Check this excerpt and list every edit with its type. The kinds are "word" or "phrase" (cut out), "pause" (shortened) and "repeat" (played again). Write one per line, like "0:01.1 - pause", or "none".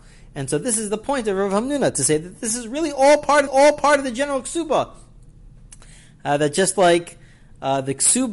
0:03.5 - repeat